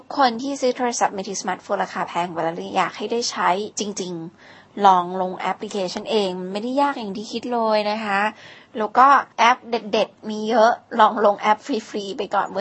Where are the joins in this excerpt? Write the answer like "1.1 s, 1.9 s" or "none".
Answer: 3.7 s, 9.3 s